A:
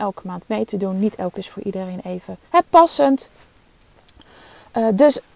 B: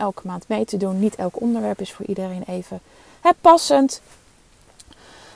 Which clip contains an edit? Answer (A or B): A